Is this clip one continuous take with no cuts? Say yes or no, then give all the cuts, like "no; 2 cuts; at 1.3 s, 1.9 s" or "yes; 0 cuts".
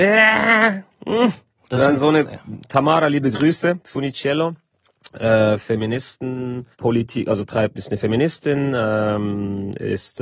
no; 1 cut; at 6.7 s